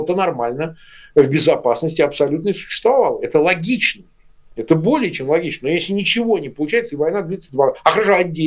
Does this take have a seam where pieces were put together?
no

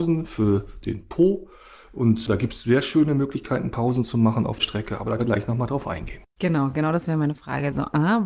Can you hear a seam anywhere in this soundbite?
yes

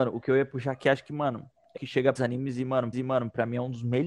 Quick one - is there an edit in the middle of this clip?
yes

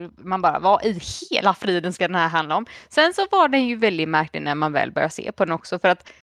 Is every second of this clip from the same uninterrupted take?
yes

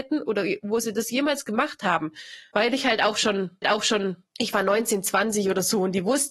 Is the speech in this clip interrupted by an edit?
yes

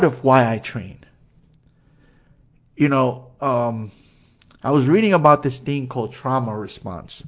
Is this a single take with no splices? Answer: yes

